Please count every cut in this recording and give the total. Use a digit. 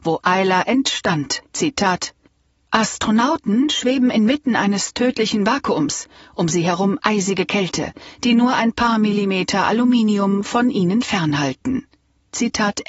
1